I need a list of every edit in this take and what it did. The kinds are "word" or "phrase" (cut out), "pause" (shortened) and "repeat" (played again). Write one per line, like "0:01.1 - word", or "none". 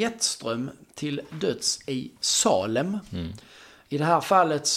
none